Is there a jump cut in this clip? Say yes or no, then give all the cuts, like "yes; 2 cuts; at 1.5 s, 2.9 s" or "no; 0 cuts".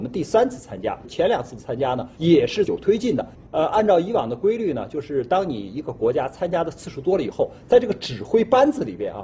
yes; 1 cut; at 2.1 s